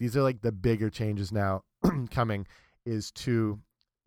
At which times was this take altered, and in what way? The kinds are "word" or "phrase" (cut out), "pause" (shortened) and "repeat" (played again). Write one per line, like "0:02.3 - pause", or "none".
none